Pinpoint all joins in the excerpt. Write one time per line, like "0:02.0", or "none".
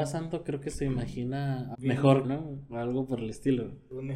0:01.7
0:02.2